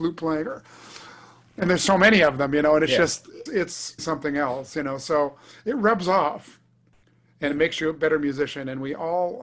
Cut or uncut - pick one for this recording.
cut